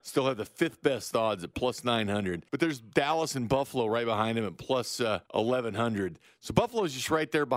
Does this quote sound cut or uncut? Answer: cut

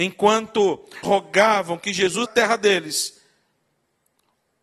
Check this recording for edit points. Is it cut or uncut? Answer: cut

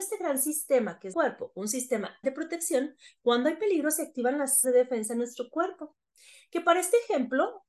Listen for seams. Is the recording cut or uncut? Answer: cut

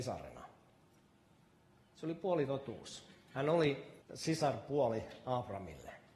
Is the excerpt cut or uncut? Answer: cut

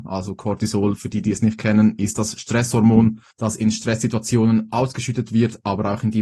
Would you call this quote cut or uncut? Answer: cut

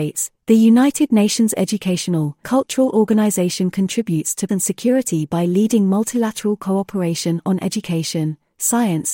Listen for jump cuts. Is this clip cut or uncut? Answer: cut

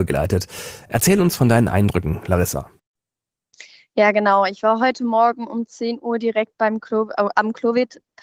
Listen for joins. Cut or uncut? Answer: uncut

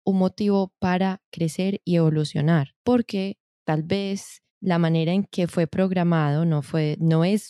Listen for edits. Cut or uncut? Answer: cut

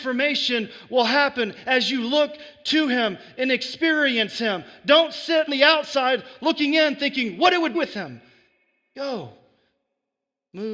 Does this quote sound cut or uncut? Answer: cut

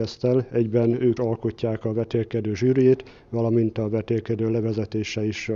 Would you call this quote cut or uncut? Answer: cut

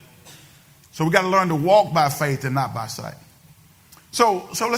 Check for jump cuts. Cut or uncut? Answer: uncut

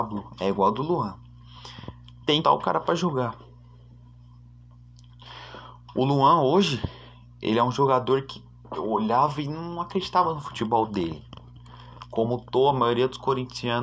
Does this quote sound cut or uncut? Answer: cut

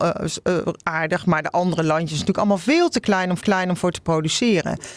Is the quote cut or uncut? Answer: cut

